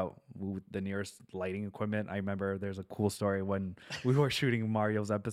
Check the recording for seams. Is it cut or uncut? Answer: uncut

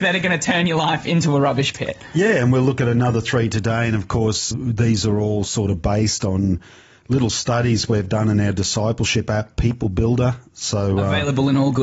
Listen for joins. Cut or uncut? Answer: cut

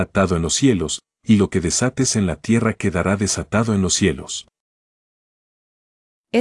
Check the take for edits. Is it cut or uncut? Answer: uncut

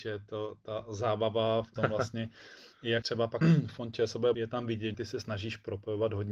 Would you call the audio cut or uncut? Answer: cut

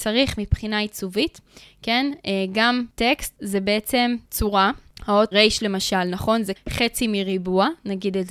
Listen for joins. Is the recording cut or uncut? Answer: cut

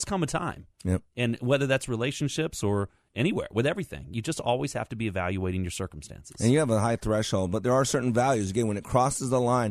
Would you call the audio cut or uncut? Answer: uncut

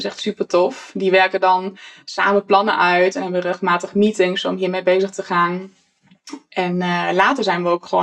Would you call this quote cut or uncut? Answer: uncut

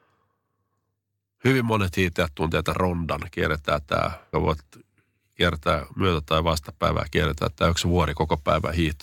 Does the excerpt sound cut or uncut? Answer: cut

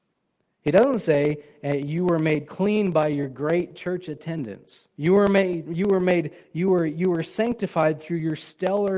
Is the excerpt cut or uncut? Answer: cut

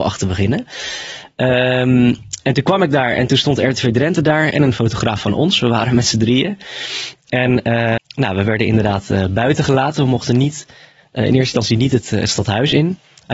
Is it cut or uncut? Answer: cut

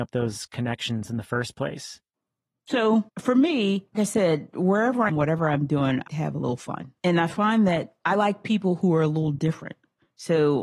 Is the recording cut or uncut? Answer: cut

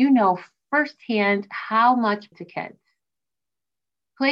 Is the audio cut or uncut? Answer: cut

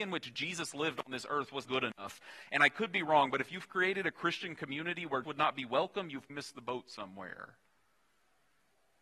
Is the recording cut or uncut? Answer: cut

